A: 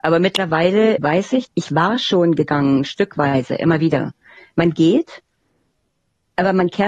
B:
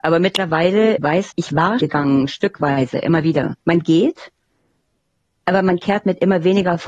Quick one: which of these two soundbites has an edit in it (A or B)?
B